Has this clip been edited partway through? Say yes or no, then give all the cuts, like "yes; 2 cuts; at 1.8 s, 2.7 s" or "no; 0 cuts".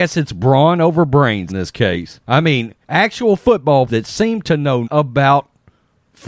yes; 5 cuts; at 1.5 s, 2.2 s, 2.8 s, 3.9 s, 4.8 s